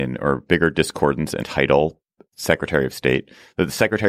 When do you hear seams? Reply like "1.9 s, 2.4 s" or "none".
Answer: 1.4 s, 2.3 s